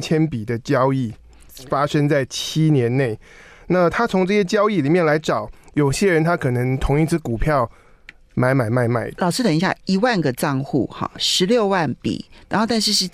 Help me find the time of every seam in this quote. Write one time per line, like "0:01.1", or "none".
0:11.2